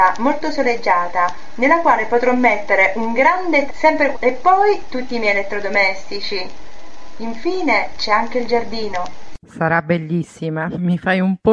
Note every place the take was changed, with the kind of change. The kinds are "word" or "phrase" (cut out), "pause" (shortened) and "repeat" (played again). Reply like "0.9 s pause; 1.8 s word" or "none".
3.7 s word; 4.1 s word; 9.4 s pause